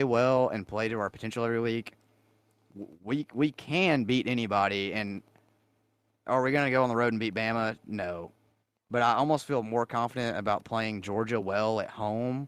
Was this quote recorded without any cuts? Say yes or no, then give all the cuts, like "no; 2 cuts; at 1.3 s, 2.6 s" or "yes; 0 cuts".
yes; 0 cuts